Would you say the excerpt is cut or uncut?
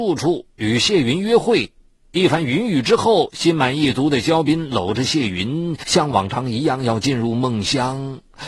uncut